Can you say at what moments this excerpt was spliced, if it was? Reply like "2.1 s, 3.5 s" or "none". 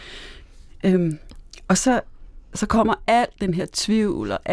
none